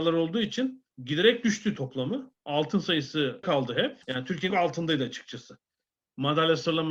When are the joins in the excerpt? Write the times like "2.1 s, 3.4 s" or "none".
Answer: 0.9 s, 1.8 s, 2.4 s, 3.4 s, 4.0 s, 4.5 s